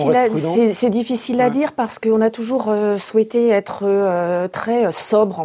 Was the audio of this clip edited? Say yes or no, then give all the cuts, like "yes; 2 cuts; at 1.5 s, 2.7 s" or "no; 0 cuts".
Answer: no; 0 cuts